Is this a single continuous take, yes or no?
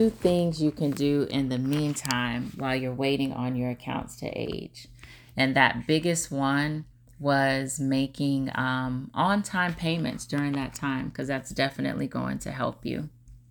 yes